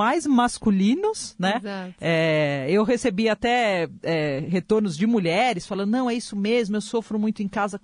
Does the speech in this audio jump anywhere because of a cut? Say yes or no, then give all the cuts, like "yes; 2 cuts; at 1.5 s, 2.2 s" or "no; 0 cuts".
no; 0 cuts